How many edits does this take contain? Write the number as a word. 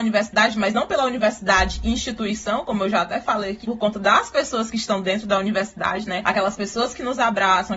one